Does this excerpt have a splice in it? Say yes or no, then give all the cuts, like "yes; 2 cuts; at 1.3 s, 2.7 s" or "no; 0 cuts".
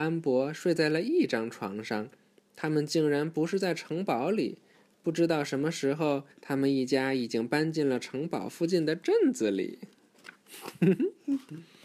yes; 1 cut; at 6.3 s